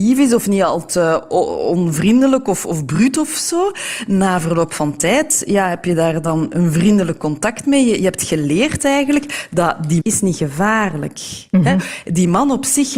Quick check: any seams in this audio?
yes; 1 cut; at 10.0 s

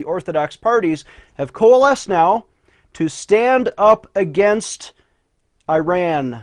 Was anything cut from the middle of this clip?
no; 0 cuts

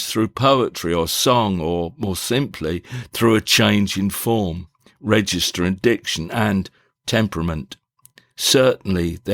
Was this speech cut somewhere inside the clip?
no; 0 cuts

